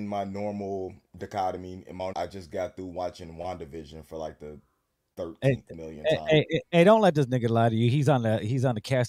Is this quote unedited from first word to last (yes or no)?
no